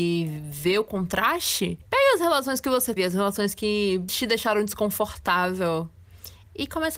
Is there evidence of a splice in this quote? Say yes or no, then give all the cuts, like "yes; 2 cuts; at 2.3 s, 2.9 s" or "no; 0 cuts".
yes; 2 cuts; at 3.0 s, 4.1 s